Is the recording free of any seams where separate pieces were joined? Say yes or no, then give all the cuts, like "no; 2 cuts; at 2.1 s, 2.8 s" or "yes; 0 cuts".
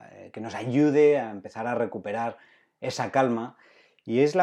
yes; 0 cuts